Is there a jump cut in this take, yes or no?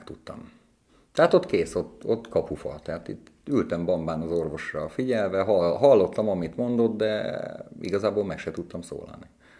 no